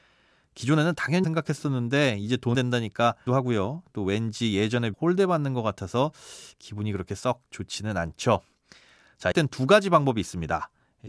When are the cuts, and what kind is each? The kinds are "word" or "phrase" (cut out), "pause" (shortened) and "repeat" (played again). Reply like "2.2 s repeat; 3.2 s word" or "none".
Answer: 1.2 s word; 2.5 s word; 3.3 s word; 4.9 s word; 9.3 s word